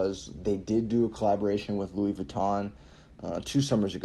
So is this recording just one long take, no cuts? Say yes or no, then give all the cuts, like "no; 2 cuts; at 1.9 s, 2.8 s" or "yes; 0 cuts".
yes; 0 cuts